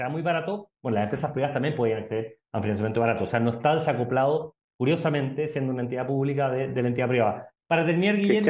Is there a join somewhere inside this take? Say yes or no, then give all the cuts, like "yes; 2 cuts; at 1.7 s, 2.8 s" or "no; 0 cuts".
no; 0 cuts